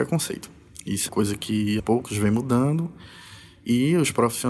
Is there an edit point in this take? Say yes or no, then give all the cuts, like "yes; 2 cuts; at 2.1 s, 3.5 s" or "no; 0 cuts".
yes; 2 cuts; at 1.1 s, 1.8 s